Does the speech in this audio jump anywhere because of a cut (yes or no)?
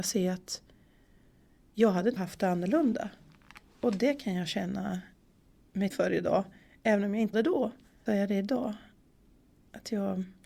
yes